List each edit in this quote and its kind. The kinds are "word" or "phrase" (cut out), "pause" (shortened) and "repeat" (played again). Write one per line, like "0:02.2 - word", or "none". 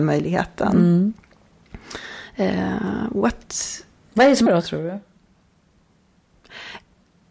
0:04.5 - word